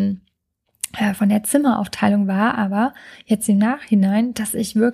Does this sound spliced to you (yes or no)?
no